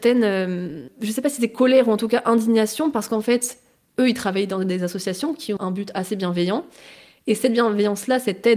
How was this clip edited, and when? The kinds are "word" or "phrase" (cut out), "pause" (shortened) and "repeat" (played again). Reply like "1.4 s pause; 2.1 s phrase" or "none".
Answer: 5.6 s word